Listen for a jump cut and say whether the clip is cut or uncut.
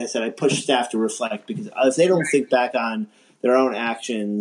uncut